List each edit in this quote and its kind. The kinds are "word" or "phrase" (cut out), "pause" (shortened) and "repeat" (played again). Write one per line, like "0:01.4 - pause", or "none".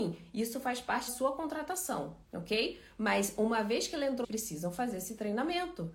0:01.1 - word
0:02.2 - pause
0:04.2 - phrase